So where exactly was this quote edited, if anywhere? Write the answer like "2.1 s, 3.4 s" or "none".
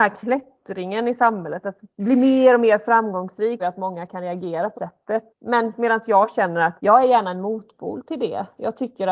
3.6 s, 4.7 s, 5.3 s, 6.8 s